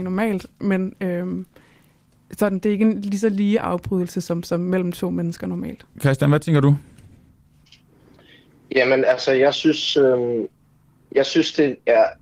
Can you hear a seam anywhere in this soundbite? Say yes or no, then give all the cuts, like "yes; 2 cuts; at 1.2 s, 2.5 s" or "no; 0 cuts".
no; 0 cuts